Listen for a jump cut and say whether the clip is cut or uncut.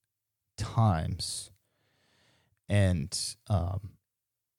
uncut